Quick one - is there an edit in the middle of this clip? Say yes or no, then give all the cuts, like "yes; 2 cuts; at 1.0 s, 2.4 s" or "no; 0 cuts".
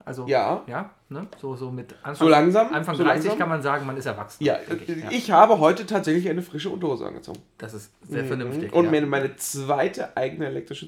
no; 0 cuts